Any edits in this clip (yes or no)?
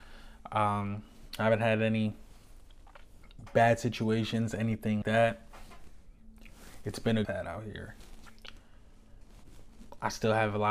yes